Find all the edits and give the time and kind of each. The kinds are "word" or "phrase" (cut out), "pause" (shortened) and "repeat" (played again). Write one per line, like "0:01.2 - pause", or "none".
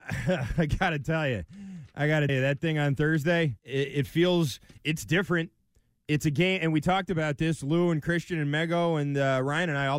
0:02.3 - word
0:03.6 - pause